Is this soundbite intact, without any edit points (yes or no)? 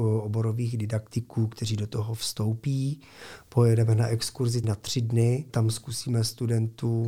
no